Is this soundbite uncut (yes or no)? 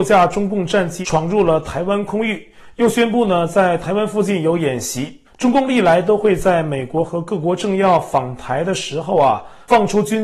no